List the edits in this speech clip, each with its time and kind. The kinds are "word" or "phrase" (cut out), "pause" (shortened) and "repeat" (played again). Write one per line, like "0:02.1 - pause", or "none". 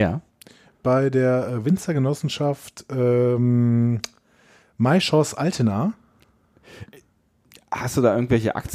none